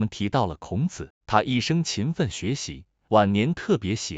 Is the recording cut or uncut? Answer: cut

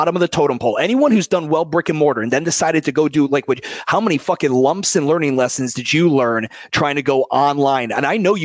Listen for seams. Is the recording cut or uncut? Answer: uncut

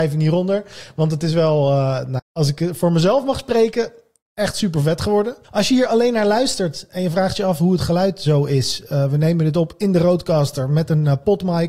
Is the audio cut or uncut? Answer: cut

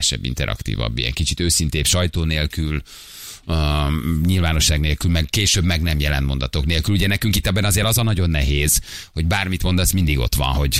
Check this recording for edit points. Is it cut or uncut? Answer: uncut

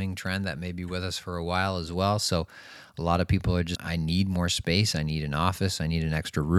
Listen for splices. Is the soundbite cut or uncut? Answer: cut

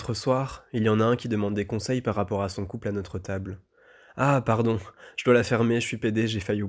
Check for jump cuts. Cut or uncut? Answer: uncut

